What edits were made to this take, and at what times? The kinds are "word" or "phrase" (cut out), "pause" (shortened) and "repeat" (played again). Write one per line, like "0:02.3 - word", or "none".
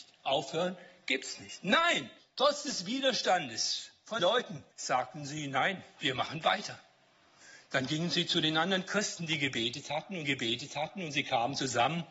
0:02.2 - pause
0:04.2 - word
0:04.7 - pause
0:10.2 - repeat